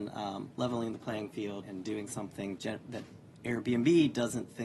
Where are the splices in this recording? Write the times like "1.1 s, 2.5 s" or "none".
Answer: 1.6 s, 2.6 s